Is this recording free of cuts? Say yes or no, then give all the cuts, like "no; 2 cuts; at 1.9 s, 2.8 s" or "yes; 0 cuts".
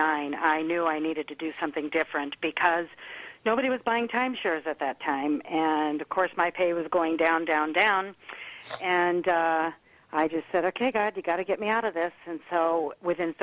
yes; 0 cuts